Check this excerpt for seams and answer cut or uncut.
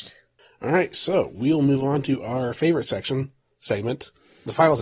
uncut